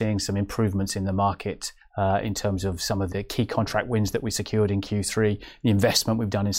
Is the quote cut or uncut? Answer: cut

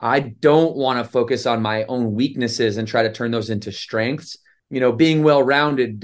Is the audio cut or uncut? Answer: cut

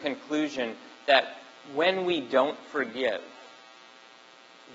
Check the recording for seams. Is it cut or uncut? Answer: uncut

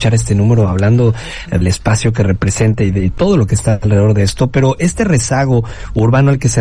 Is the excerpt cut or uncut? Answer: cut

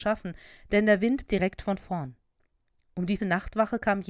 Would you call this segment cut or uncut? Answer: cut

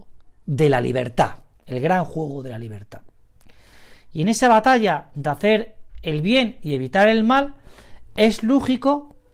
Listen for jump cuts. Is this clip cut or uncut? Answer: uncut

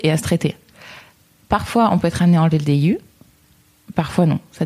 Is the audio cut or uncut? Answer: uncut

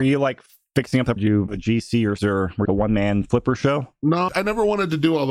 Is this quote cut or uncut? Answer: cut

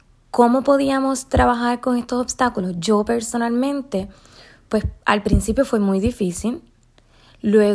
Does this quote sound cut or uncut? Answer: uncut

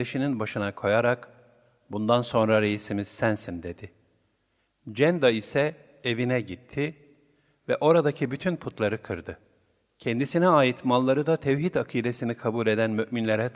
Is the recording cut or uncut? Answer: uncut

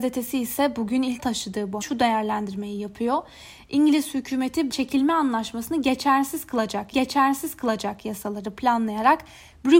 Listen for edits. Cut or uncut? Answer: cut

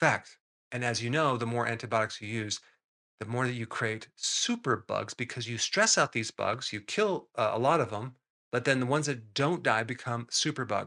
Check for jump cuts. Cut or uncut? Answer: uncut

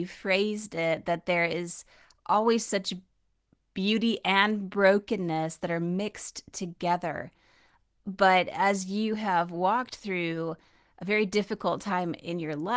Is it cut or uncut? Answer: uncut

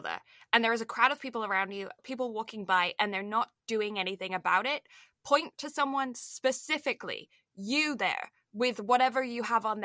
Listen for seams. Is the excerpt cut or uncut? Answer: cut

